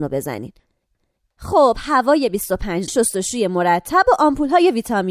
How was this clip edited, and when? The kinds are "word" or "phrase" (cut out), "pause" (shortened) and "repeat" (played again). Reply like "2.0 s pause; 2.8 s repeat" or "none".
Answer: 2.9 s word